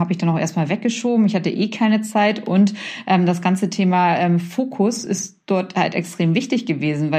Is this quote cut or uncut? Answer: uncut